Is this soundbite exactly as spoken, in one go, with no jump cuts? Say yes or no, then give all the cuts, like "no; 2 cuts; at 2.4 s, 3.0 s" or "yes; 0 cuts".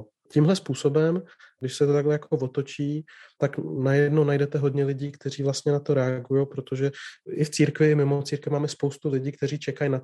yes; 0 cuts